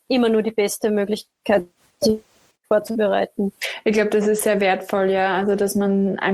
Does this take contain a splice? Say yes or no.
no